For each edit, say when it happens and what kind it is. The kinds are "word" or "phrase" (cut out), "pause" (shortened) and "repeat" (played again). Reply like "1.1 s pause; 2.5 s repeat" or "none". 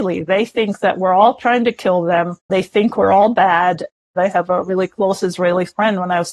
2.4 s pause